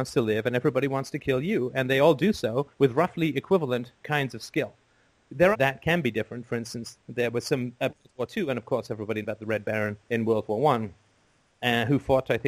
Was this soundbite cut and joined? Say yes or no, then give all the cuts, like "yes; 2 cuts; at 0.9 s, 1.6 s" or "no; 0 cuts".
yes; 7 cuts; at 2.7 s, 4.0 s, 5.5 s, 7.0 s, 7.9 s, 9.2 s, 10.0 s